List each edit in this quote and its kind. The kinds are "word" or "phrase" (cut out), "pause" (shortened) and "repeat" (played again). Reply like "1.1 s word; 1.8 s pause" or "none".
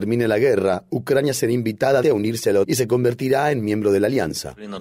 2.0 s word; 2.6 s word